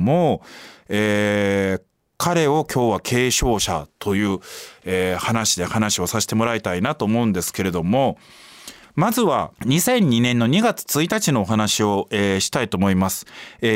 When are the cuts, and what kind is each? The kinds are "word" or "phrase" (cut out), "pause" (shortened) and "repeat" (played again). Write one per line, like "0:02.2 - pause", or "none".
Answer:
0:09.6 - pause

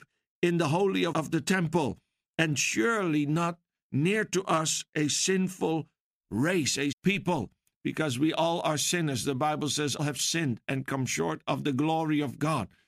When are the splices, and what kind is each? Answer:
0:01.1 - word
0:06.9 - word
0:10.0 - word

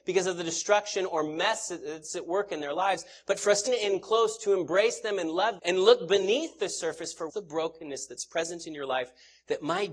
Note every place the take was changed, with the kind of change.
0:03.7 - word
0:05.6 - word
0:07.3 - word

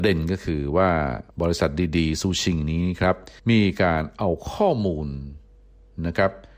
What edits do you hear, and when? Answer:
0:01.3 - pause
0:03.4 - pause

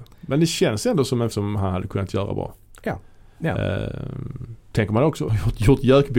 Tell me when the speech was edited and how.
0:01.3 - word
0:05.3 - word

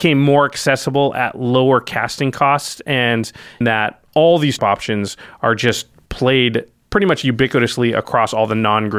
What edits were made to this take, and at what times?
0:03.6 - phrase
0:04.6 - phrase
0:06.8 - pause

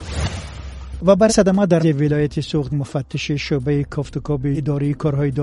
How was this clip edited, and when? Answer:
0:01.3 - word
0:01.8 - word
0:02.7 - word
0:04.5 - word

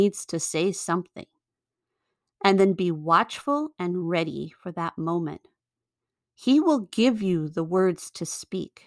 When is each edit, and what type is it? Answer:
none

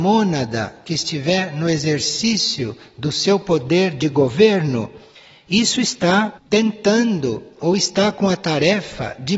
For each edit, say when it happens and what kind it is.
none

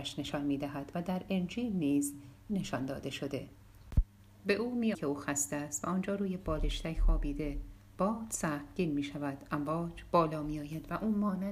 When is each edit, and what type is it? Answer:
0:02.5 - word
0:04.9 - phrase

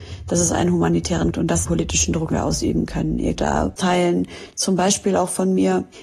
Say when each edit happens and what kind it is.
0:01.3 - phrase
0:01.6 - phrase
0:02.3 - word
0:03.4 - word
0:03.8 - word

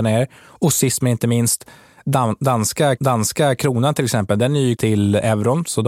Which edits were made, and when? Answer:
0:03.0 - repeat
0:04.8 - word

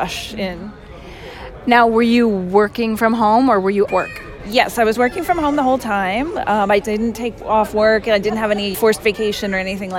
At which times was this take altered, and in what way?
0:03.9 - word
0:06.8 - word
0:08.7 - word

